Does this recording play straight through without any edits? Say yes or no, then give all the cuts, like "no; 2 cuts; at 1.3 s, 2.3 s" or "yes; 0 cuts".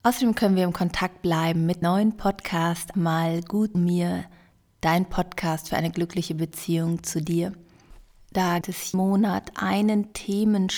no; 5 cuts; at 1.8 s, 2.9 s, 3.7 s, 8.6 s, 8.9 s